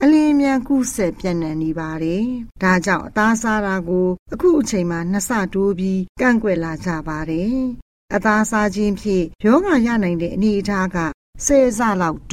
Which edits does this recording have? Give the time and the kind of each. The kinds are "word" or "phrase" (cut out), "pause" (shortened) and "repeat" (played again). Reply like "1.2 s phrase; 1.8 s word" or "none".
2.5 s pause; 9.4 s pause